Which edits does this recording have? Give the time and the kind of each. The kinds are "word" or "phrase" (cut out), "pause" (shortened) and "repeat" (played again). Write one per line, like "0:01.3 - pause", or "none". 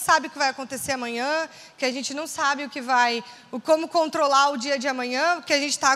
none